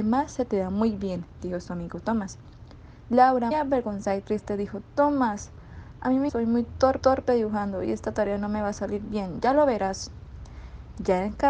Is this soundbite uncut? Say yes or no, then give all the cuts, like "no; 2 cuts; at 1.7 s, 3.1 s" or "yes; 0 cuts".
no; 3 cuts; at 3.5 s, 6.3 s, 7.0 s